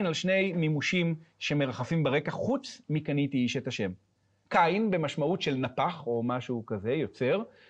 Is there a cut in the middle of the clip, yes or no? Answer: no